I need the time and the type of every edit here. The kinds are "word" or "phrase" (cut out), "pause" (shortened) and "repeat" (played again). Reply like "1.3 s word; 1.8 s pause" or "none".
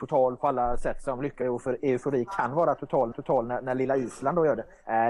1.4 s word; 3.1 s repeat